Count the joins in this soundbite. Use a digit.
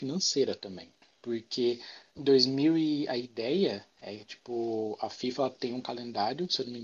1